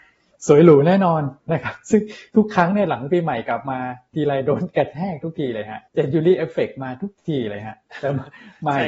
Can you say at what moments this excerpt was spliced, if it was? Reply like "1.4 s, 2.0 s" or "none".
5.9 s